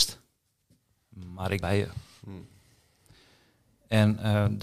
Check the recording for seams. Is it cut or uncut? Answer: cut